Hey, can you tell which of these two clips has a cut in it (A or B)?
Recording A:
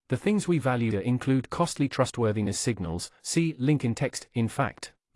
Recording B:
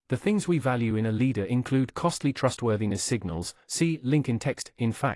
A